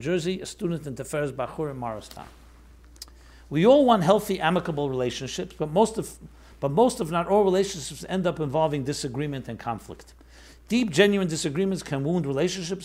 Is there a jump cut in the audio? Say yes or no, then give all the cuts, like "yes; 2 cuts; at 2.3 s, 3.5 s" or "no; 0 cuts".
no; 0 cuts